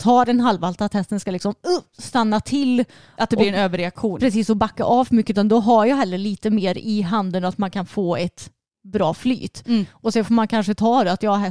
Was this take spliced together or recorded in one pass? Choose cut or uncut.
uncut